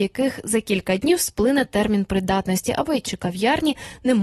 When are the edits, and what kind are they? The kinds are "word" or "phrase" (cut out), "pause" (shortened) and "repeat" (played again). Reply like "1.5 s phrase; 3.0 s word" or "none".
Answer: 3.0 s word